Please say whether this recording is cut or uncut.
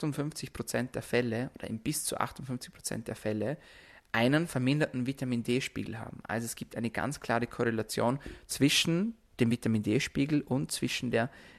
uncut